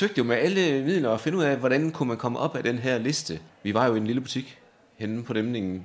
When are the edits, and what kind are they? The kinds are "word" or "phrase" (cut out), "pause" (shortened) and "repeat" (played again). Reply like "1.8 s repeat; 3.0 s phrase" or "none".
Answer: none

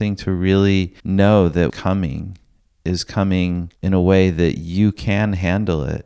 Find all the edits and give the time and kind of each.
1.0 s pause; 1.7 s word; 3.8 s pause

